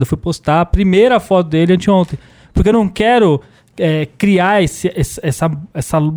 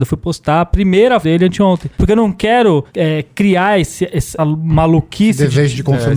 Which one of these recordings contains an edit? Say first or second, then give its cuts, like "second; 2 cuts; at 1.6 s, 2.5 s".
second; 4 cuts; at 1.2 s, 1.9 s, 2.9 s, 4.4 s